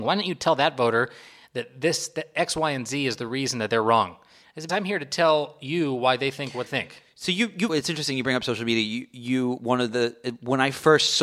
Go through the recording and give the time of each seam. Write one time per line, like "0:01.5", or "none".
0:04.7
0:06.7
0:07.7